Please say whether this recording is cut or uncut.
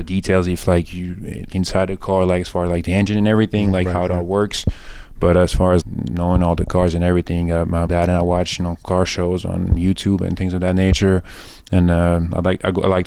cut